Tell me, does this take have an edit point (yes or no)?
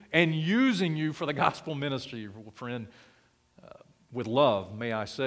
no